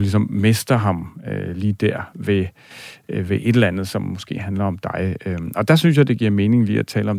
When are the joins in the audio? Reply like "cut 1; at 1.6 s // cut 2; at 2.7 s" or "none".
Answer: none